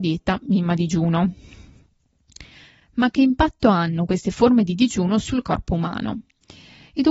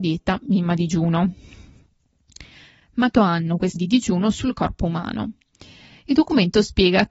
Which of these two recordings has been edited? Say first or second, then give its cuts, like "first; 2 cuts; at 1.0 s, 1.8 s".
second; 2 cuts; at 3.1 s, 3.8 s